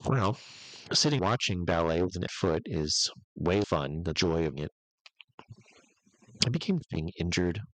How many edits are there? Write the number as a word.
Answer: six